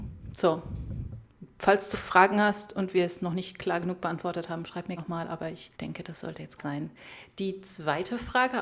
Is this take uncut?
no; 4 cuts; at 1.9 s, 5.0 s, 5.7 s, 6.6 s

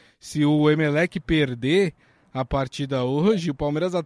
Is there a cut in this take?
no; 0 cuts

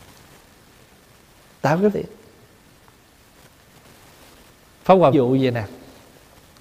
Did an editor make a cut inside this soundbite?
yes; 2 cuts; at 1.9 s, 5.1 s

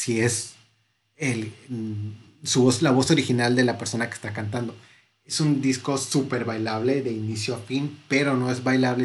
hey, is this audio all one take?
yes; 0 cuts

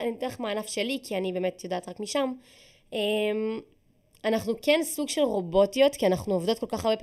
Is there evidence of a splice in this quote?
no; 0 cuts

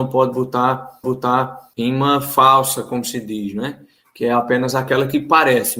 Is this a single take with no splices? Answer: no; 1 cut; at 1.0 s

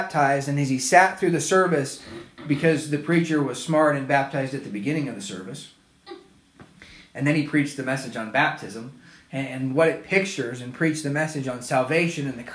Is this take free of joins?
yes; 0 cuts

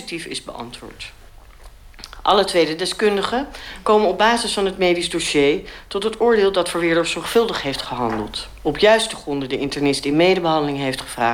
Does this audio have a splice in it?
no; 0 cuts

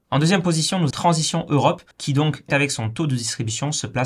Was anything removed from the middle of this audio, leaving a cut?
yes; 3 cuts; at 0.9 s, 1.9 s, 2.5 s

